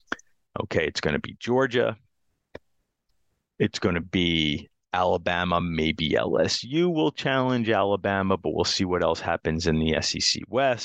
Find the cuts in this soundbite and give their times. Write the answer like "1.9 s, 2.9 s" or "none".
none